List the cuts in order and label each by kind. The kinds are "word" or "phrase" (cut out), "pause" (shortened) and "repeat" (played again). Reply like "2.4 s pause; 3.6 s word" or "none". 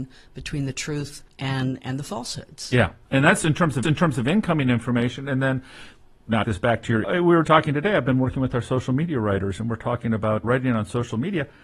1.3 s pause; 3.8 s repeat; 6.4 s phrase; 7.0 s phrase; 7.4 s word; 10.4 s word